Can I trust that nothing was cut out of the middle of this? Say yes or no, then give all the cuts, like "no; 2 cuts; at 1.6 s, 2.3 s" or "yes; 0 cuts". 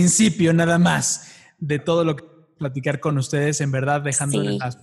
yes; 0 cuts